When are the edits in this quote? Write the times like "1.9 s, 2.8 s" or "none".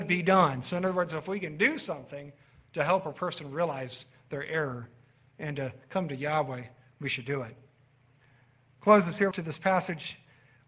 9.3 s